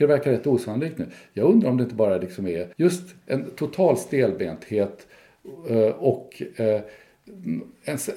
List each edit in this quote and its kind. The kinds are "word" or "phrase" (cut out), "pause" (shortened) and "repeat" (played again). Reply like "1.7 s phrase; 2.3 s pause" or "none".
2.7 s pause